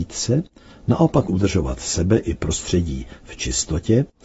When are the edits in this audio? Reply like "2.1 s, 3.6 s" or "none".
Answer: 1.3 s